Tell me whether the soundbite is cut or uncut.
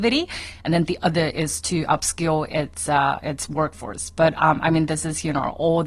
uncut